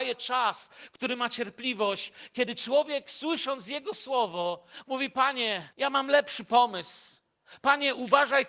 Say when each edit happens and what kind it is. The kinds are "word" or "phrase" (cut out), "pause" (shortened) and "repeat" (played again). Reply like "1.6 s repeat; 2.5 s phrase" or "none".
5.7 s pause